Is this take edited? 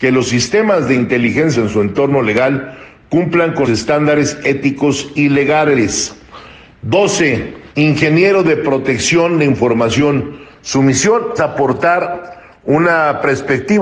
yes; 4 cuts; at 1.5 s, 3.6 s, 7.7 s, 11.4 s

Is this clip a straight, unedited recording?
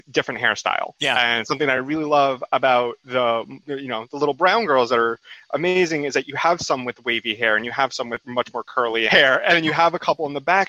yes; 0 cuts

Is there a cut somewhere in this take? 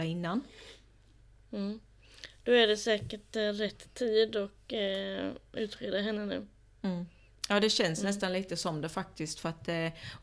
no; 0 cuts

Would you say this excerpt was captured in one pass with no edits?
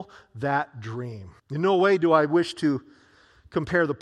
no; 1 cut; at 1.4 s

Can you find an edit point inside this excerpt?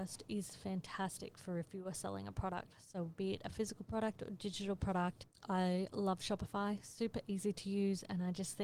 no; 0 cuts

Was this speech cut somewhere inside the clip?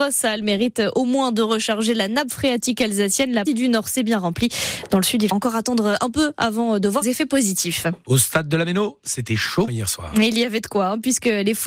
yes; 4 cuts; at 3.5 s, 5.3 s, 7.0 s, 9.7 s

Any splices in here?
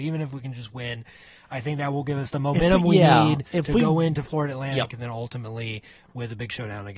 no; 0 cuts

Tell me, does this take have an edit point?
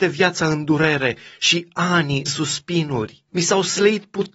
yes; 2 cuts; at 2.2 s, 3.3 s

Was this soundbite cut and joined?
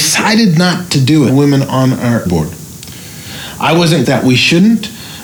yes; 3 cuts; at 1.3 s, 2.3 s, 4.0 s

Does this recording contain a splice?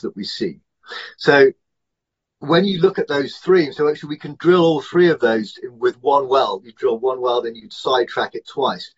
no; 0 cuts

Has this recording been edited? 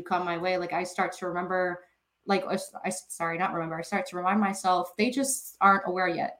no; 0 cuts

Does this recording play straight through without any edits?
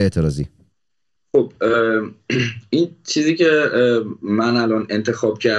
yes; 0 cuts

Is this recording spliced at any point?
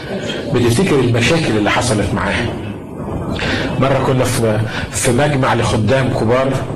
no; 0 cuts

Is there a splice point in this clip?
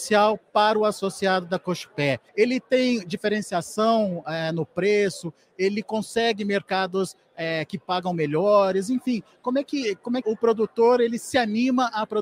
yes; 2 cuts; at 2.3 s, 10.2 s

